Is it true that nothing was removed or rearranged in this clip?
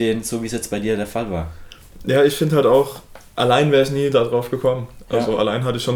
yes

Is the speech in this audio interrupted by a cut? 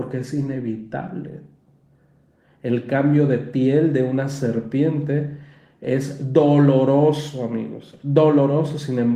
no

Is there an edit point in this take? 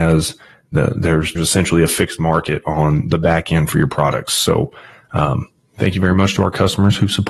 yes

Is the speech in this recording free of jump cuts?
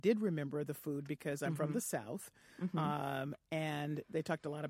yes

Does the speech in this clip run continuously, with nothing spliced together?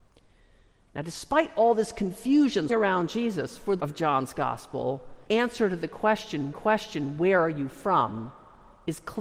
no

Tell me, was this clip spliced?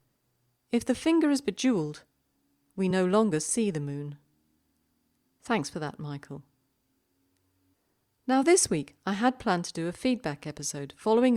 no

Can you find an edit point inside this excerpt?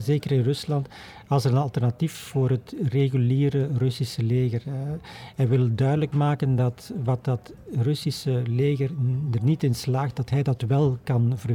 no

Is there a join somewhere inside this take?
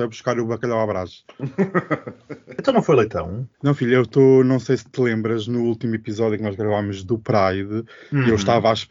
no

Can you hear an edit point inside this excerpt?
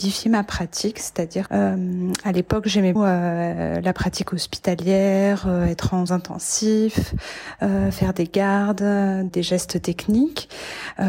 yes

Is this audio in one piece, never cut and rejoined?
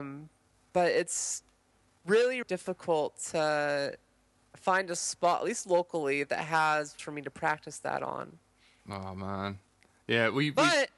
no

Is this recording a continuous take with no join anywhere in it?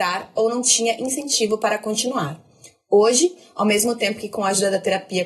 yes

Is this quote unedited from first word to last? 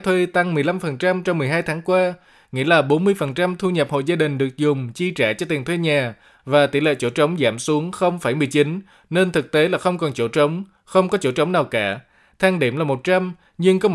yes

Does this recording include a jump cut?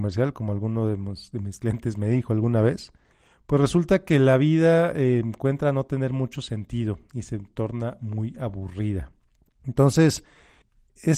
no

